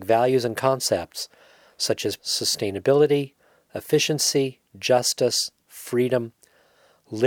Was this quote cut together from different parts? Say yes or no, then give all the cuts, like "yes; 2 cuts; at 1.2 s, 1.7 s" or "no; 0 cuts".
yes; 2 cuts; at 2.2 s, 4.7 s